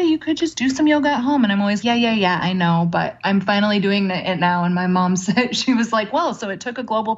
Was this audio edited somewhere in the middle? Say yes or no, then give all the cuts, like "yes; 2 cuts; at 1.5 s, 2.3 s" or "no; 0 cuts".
yes; 1 cut; at 1.8 s